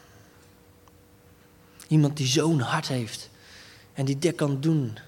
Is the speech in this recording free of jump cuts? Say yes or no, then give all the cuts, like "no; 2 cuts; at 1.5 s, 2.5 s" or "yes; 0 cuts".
yes; 0 cuts